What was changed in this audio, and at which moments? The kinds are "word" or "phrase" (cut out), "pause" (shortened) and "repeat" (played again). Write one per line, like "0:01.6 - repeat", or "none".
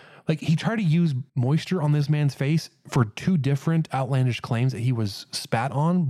0:01.3 - pause